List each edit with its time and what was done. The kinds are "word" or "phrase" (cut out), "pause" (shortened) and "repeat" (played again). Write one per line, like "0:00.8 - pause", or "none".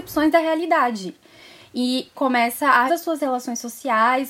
0:02.1 - word
0:02.9 - phrase